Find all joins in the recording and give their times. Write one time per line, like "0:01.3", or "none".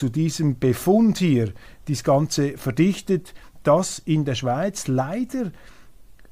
none